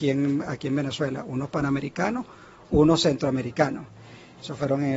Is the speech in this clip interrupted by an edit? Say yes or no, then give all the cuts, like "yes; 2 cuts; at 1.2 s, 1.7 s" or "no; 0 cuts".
no; 0 cuts